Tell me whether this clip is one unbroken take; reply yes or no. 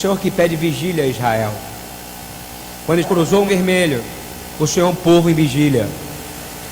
no